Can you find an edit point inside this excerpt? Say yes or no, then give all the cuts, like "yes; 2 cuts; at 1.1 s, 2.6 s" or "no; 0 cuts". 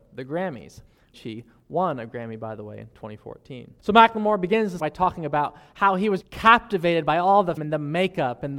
yes; 5 cuts; at 1.1 s, 3.8 s, 4.8 s, 6.2 s, 7.6 s